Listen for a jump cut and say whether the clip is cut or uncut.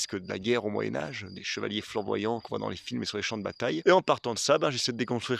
uncut